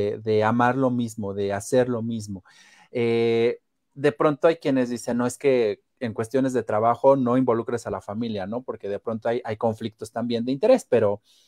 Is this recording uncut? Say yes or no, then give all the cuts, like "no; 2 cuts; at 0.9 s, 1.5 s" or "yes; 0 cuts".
yes; 0 cuts